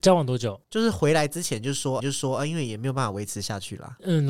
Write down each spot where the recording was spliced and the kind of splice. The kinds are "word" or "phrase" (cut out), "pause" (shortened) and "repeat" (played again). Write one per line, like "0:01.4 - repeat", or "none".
0:02.0 - repeat